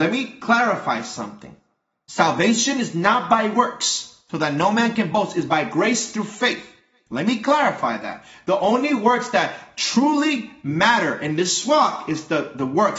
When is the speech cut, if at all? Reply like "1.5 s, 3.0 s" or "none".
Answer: none